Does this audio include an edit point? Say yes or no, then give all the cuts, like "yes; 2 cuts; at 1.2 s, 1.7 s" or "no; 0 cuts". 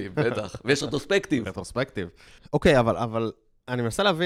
no; 0 cuts